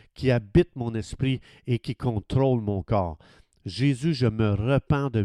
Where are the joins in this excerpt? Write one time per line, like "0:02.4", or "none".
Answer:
none